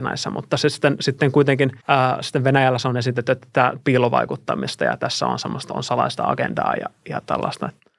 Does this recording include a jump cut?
yes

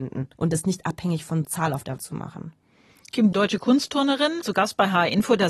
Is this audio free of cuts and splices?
no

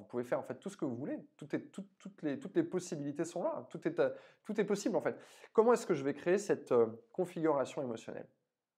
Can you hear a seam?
no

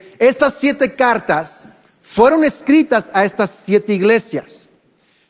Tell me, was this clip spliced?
no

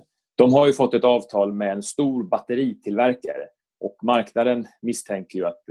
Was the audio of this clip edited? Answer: no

